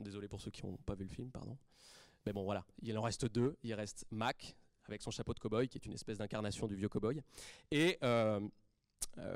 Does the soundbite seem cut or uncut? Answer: uncut